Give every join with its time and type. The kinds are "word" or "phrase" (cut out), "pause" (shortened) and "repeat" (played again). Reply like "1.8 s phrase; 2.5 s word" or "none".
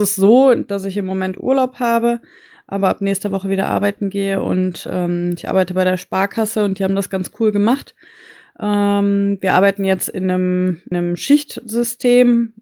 10.9 s word